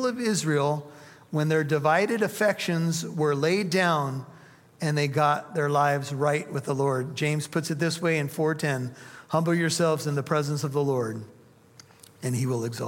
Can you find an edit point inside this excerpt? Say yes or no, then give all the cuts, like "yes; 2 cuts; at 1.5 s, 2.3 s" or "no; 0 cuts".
no; 0 cuts